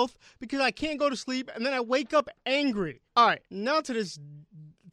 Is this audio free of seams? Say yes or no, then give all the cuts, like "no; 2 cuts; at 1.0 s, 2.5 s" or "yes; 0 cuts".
no; 2 cuts; at 3.1 s, 3.4 s